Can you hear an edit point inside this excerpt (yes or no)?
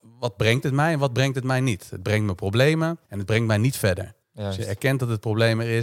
yes